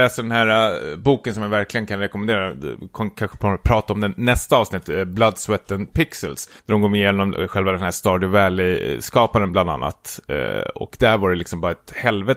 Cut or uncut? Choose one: cut